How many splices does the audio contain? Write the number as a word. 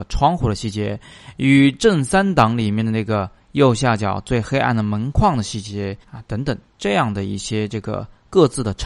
one